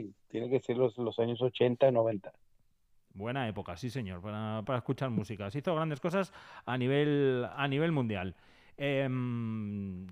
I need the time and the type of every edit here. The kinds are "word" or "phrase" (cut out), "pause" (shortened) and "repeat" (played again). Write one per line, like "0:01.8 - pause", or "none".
0:04.6 - word